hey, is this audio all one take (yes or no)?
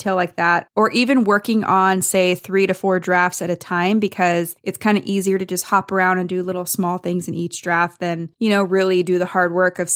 yes